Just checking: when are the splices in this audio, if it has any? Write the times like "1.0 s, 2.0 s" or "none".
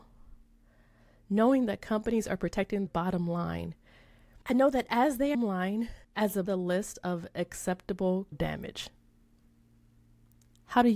2.9 s, 4.4 s, 5.3 s, 6.0 s, 6.5 s, 8.3 s